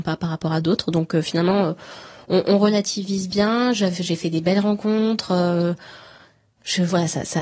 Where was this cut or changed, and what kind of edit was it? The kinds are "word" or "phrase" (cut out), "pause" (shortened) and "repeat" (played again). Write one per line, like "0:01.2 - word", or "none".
none